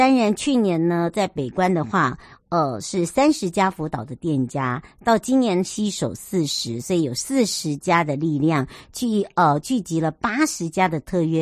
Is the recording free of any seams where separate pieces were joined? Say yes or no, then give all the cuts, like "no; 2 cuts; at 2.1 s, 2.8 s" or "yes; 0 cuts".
yes; 0 cuts